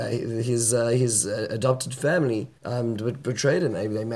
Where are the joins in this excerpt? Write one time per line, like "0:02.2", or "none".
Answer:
0:02.6